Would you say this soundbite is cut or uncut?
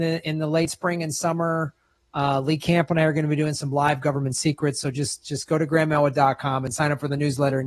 uncut